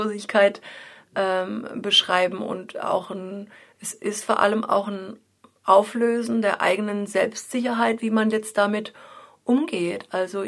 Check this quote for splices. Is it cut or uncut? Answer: uncut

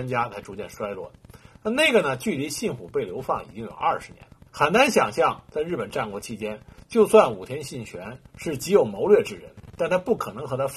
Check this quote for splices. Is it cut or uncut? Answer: cut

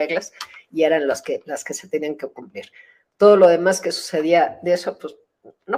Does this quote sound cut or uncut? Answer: uncut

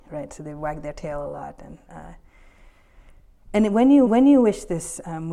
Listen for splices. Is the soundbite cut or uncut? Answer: cut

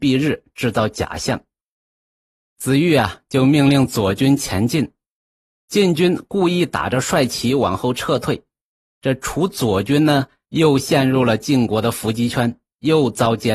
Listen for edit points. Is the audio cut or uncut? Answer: uncut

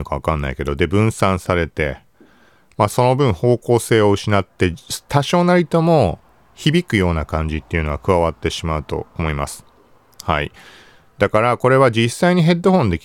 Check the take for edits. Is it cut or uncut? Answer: uncut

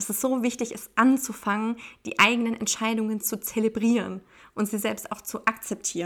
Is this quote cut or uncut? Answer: uncut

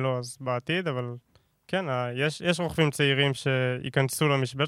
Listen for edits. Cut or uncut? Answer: uncut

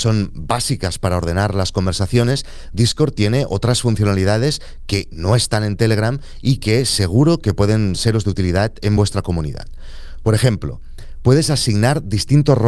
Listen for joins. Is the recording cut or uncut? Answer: uncut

